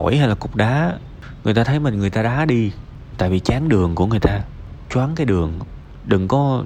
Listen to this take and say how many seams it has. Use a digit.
0